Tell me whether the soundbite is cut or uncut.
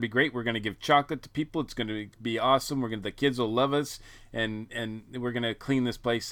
uncut